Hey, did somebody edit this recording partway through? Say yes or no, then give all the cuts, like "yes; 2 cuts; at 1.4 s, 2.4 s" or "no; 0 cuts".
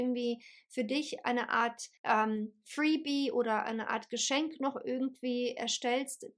yes; 1 cut; at 2.0 s